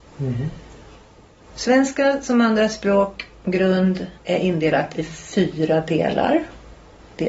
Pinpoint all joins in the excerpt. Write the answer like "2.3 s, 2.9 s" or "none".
4.2 s